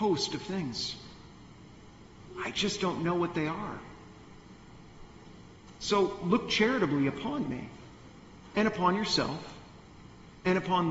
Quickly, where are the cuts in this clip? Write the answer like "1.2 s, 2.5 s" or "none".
none

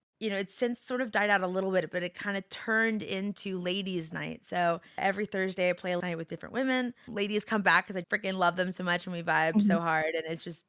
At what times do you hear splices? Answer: 5.0 s, 6.0 s, 7.1 s, 8.0 s

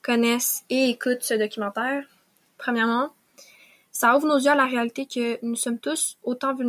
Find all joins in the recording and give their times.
none

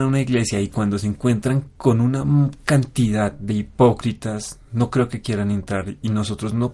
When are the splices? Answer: none

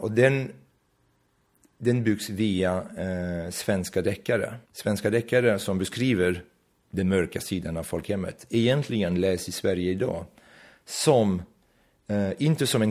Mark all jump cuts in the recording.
4.6 s

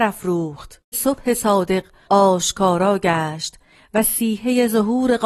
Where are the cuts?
0.9 s

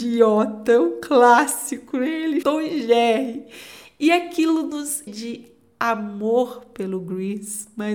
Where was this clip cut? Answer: 2.4 s, 5.1 s

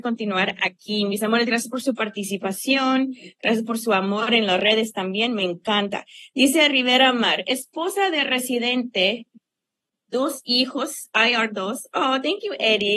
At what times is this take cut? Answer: none

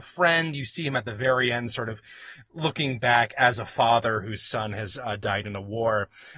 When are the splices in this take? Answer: none

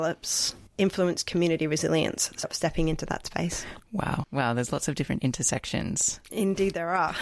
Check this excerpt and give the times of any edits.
2.4 s

